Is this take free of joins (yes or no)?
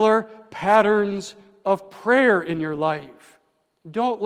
yes